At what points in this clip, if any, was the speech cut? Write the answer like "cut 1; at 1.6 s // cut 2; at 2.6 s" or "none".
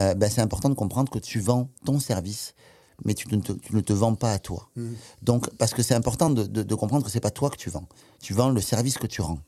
none